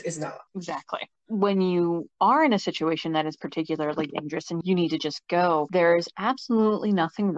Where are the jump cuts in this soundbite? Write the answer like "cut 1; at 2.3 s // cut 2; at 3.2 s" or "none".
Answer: none